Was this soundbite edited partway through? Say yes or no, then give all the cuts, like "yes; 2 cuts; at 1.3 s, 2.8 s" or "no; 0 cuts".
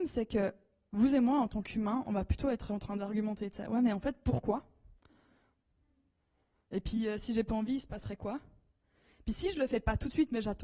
no; 0 cuts